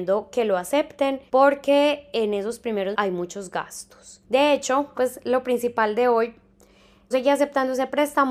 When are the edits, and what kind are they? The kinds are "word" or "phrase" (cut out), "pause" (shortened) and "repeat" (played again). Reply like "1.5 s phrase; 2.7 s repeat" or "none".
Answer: 1.3 s pause; 2.9 s word; 4.2 s pause; 4.9 s phrase; 7.1 s word